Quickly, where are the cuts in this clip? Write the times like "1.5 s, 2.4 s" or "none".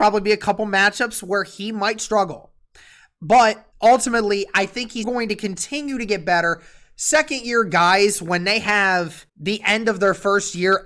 3.7 s, 5.0 s, 9.3 s